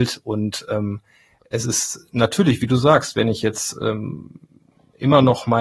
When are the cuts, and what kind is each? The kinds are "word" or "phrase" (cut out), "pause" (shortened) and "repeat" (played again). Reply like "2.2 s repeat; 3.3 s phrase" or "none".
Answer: none